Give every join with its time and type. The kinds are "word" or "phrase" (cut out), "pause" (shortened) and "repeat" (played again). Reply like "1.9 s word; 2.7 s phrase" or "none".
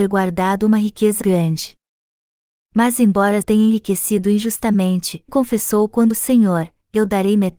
1.2 s word; 3.4 s word; 5.3 s word; 6.1 s word